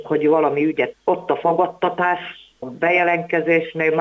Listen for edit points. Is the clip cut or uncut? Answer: cut